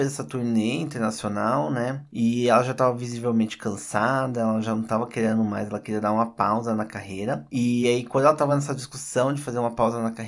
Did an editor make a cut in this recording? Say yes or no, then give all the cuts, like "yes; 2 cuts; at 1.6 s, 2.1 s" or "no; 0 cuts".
no; 0 cuts